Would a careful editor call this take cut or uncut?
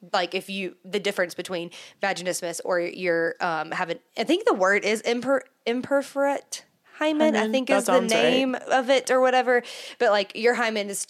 uncut